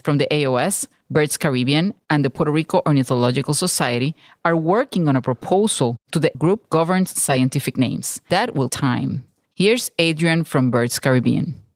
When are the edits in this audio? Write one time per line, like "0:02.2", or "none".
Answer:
0:06.3
0:06.7
0:08.3
0:08.7